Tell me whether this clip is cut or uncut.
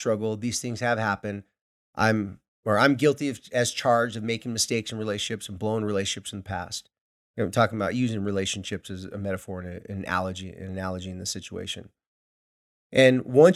uncut